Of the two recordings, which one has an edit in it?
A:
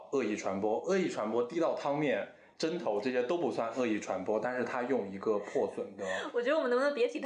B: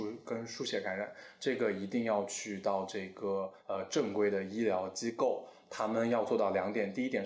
B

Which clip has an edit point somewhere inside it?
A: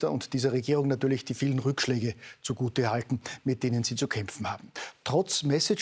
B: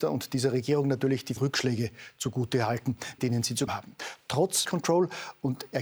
B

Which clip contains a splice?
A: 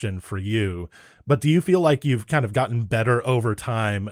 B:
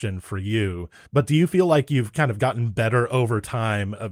B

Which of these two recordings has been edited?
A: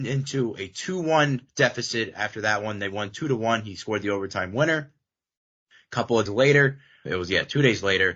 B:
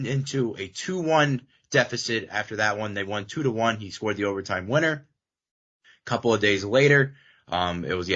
A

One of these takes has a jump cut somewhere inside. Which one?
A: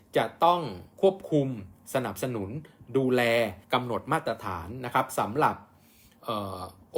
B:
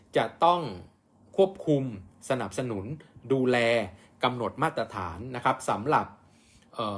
A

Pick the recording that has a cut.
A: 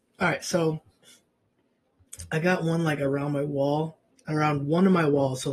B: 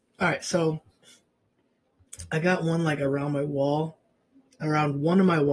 A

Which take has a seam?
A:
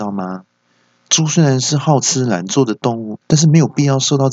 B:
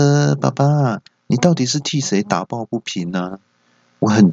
A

